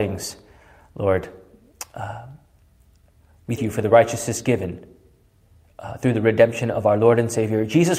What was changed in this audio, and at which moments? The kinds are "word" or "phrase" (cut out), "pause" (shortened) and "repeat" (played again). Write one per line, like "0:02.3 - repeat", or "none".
0:03.6 - word